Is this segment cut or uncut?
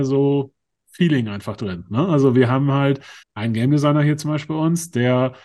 cut